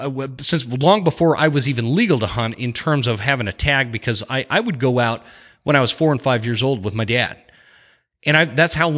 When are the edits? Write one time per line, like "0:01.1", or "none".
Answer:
none